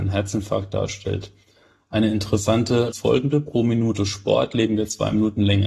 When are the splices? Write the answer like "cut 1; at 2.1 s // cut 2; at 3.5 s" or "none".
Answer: cut 1; at 2.9 s